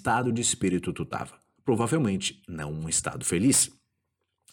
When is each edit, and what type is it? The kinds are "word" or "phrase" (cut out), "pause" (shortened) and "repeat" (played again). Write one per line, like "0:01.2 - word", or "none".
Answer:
0:01.6 - pause